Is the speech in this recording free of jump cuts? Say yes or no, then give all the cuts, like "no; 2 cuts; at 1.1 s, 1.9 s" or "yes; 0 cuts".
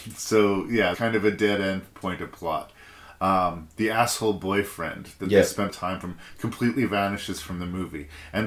no; 2 cuts; at 0.9 s, 5.7 s